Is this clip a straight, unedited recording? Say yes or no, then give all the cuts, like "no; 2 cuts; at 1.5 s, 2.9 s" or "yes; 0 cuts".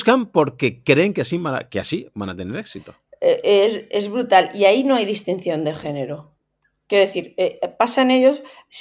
yes; 0 cuts